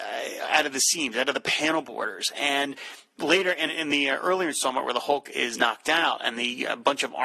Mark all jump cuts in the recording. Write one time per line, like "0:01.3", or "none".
0:03.7
0:05.5